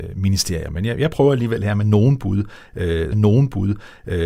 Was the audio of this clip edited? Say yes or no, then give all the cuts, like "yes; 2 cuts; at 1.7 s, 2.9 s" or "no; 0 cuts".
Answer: yes; 1 cut; at 3.1 s